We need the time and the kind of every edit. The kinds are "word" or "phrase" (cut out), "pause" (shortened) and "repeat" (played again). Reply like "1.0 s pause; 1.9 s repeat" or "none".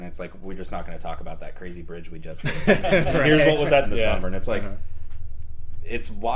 3.8 s phrase; 4.2 s word